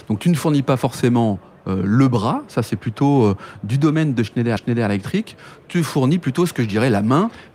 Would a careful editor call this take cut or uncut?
cut